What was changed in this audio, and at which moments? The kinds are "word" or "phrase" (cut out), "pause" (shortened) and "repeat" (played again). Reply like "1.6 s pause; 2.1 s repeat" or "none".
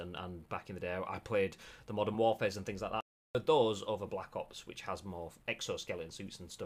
none